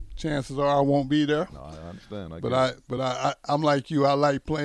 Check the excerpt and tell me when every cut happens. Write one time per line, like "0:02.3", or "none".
none